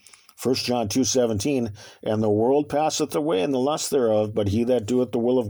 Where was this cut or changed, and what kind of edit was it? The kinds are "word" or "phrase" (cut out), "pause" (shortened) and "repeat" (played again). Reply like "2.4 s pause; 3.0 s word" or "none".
none